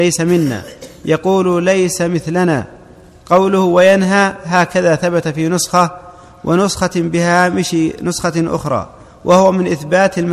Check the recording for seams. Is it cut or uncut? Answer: uncut